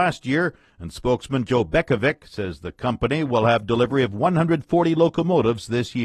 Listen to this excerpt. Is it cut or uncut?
uncut